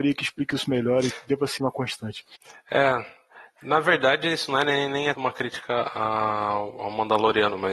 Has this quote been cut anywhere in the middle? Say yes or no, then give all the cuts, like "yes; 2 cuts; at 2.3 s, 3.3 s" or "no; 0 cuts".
yes; 3 cuts; at 1.6 s, 2.4 s, 5.2 s